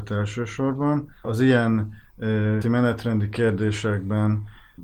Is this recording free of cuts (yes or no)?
no